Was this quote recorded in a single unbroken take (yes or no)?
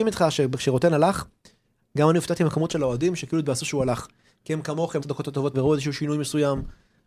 no